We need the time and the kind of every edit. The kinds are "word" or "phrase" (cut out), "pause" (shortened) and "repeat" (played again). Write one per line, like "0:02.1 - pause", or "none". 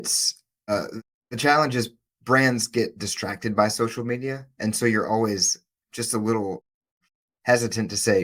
none